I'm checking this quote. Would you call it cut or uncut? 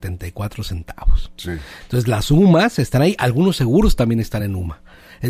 uncut